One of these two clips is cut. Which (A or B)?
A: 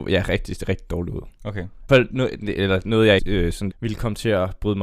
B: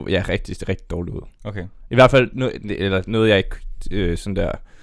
A